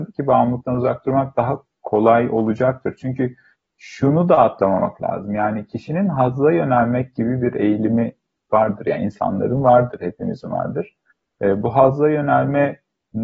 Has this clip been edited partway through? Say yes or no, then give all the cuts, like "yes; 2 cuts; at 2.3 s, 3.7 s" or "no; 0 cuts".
no; 0 cuts